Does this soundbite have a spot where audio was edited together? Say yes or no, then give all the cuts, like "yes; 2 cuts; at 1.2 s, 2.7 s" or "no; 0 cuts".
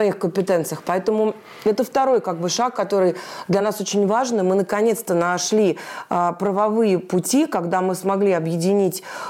no; 0 cuts